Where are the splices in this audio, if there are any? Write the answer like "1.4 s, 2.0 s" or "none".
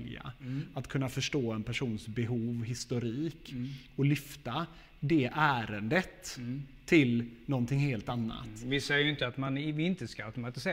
none